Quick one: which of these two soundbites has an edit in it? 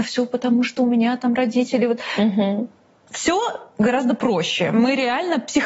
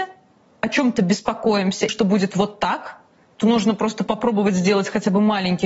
second; 1 cut; at 1.9 s

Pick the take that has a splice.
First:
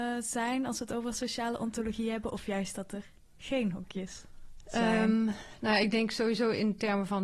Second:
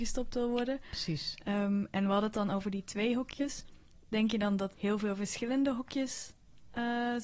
second; 1 cut; at 4.7 s

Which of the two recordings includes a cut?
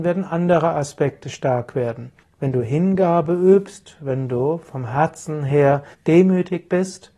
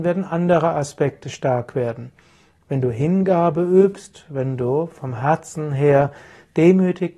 first; 2 cuts; at 2.2 s, 5.9 s

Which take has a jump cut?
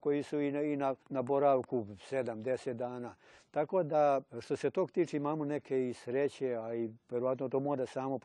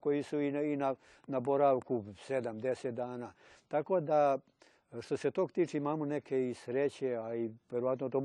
first; 2 cuts; at 1.0 s, 4.3 s

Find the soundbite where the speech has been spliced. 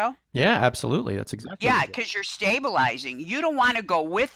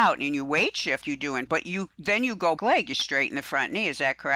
second; 3 cuts; at 1.0 s, 1.5 s, 2.6 s

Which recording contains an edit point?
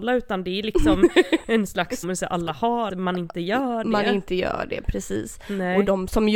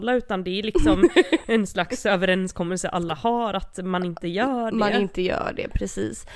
first; 2 cuts; at 2.0 s, 2.9 s

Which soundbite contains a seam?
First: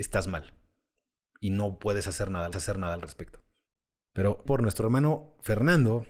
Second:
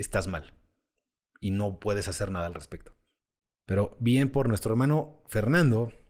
first; 2 cuts; at 2.5 s, 4.5 s

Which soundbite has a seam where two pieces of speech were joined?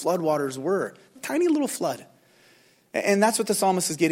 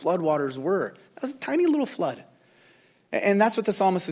first; 1 cut; at 1.2 s

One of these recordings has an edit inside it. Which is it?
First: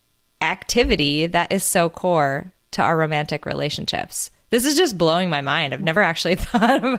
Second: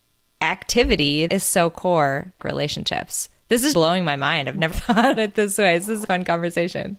second; 6 cuts; at 1.3 s, 2.4 s, 3.7 s, 4.7 s, 5.2 s, 6.0 s

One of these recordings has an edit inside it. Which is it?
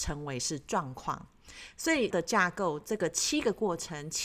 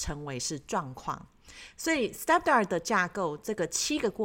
first; 1 cut; at 2.1 s

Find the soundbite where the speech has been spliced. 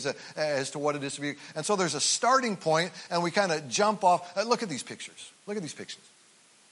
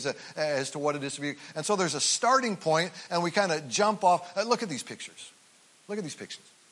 first; 1 cut; at 5.4 s

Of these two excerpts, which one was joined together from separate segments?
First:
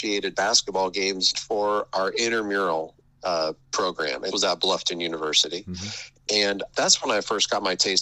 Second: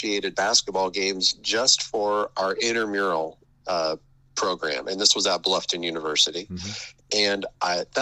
first; 4 cuts; at 1.3 s, 3.6 s, 4.3 s, 6.7 s

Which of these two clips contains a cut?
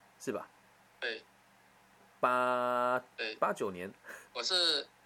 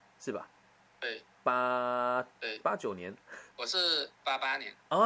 second; 2 cuts; at 1.3 s, 4.1 s

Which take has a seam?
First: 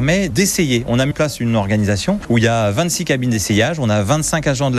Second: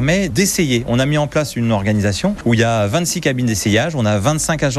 first; 1 cut; at 1.1 s

